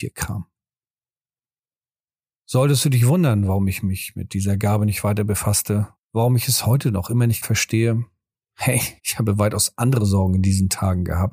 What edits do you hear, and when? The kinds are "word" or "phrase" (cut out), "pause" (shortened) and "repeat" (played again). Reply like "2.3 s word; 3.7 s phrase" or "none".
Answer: 7.4 s word; 9.0 s pause